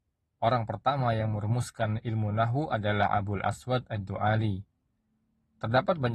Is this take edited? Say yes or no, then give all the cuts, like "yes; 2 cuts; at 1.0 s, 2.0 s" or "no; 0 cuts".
no; 0 cuts